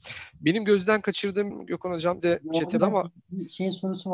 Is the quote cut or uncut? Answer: cut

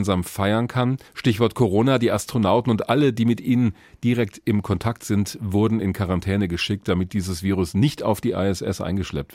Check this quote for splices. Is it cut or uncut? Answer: cut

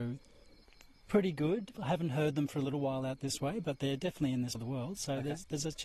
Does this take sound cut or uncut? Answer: cut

